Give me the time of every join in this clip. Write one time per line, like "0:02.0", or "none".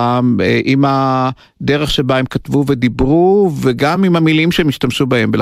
none